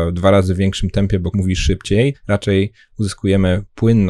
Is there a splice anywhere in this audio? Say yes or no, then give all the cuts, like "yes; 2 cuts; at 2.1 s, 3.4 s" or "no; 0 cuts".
yes; 2 cuts; at 1.3 s, 2.1 s